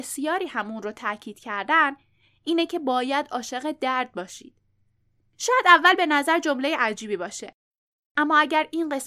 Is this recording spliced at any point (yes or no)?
no